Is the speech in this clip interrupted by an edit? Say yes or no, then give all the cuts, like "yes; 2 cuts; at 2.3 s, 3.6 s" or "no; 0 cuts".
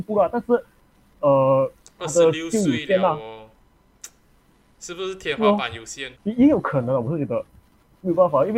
yes; 1 cut; at 6.2 s